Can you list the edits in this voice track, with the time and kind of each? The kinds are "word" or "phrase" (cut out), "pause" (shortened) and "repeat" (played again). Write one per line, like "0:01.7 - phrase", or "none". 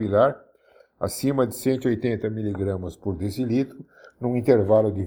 none